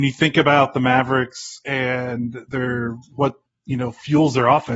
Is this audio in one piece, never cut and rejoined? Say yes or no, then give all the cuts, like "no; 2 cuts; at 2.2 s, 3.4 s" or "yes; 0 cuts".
yes; 0 cuts